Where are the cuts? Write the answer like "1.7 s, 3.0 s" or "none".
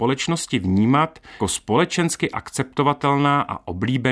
1.4 s

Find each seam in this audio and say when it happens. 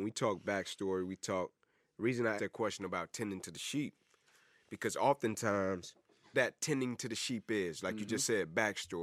2.4 s, 6.3 s

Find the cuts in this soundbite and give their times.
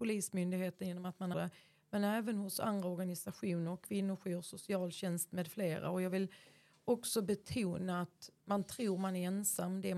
1.3 s

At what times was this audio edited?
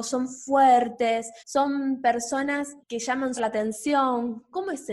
1.4 s, 2.8 s, 3.4 s

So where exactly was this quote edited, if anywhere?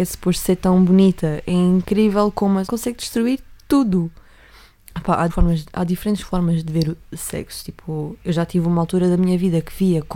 2.7 s, 5.3 s

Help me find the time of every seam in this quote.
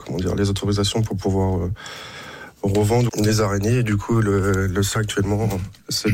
3.1 s, 5.0 s

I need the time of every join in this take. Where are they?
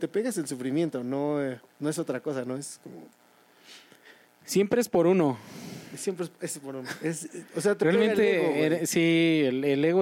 1.7 s

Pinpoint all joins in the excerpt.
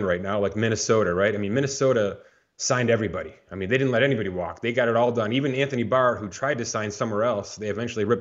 none

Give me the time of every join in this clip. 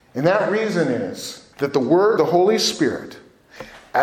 1.5 s, 2.2 s

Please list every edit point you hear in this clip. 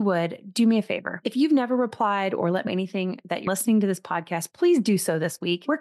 2.7 s, 3.5 s

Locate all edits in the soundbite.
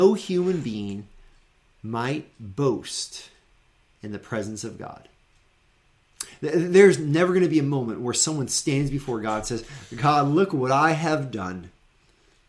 none

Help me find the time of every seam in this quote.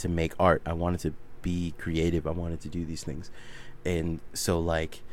none

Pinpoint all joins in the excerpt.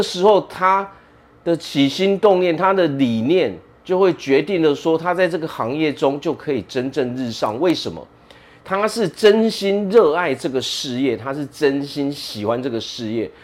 none

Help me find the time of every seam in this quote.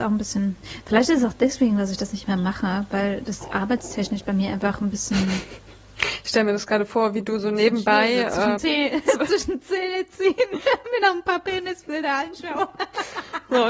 8.6 s

